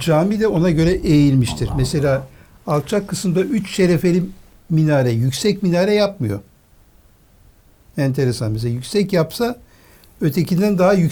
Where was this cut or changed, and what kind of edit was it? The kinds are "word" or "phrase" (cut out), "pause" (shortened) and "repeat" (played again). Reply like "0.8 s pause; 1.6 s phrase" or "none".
none